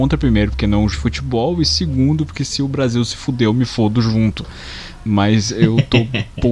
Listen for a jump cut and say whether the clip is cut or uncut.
cut